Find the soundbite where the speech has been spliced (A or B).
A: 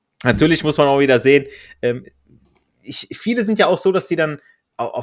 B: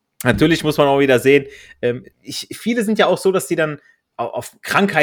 B